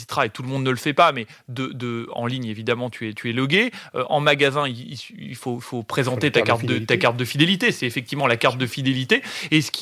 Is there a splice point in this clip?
no; 0 cuts

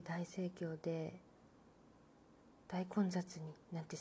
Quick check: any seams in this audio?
no; 0 cuts

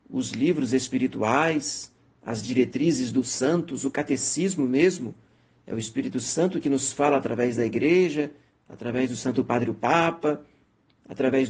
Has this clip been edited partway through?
no; 0 cuts

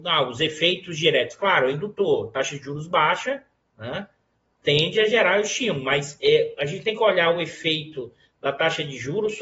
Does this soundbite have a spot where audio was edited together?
no; 0 cuts

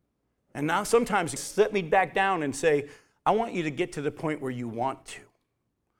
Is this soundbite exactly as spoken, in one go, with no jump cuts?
no; 1 cut; at 1.4 s

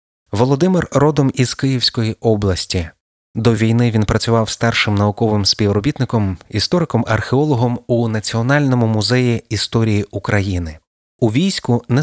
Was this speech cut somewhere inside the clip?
no; 0 cuts

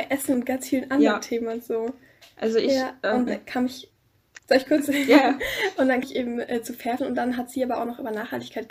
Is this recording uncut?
no; 3 cuts; at 3.3 s, 6.0 s, 7.0 s

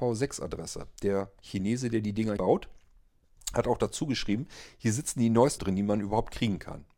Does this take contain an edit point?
yes; 2 cuts; at 2.4 s, 5.6 s

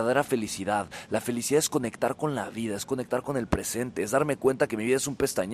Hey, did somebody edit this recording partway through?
no; 0 cuts

